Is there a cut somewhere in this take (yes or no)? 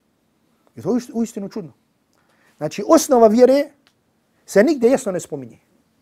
no